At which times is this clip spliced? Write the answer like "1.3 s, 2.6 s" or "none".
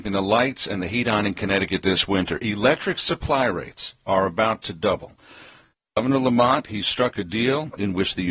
none